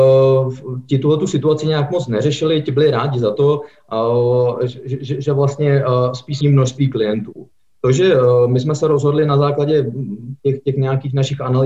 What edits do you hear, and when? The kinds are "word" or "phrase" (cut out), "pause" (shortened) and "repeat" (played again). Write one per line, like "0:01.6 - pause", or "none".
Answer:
0:06.4 - phrase